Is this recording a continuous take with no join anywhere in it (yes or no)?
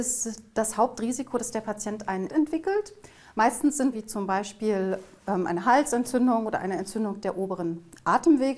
no